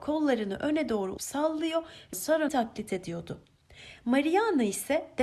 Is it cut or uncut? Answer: cut